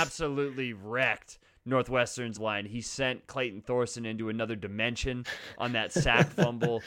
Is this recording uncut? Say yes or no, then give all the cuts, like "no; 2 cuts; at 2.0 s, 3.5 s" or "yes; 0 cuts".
no; 1 cut; at 2.4 s